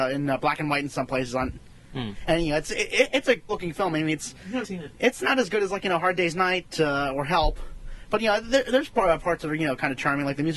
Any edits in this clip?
yes; 2 cuts; at 3.5 s, 4.6 s

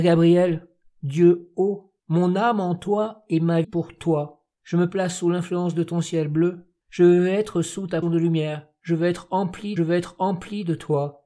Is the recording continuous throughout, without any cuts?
no; 6 cuts; at 2.0 s, 3.6 s, 4.5 s, 6.8 s, 8.0 s, 9.8 s

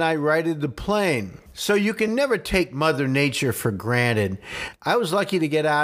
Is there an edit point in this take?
no; 0 cuts

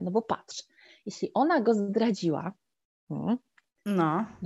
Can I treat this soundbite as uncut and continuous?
yes; 0 cuts

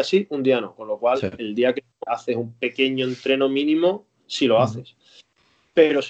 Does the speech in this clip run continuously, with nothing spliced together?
no; 1 cut; at 2.1 s

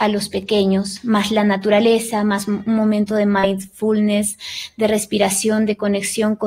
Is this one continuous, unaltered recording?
yes; 0 cuts

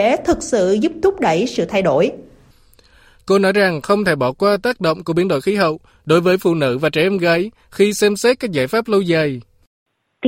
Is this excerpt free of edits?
yes; 0 cuts

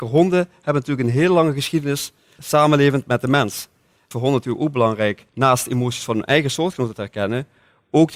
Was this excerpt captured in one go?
no; 3 cuts; at 2.4 s, 4.1 s, 5.3 s

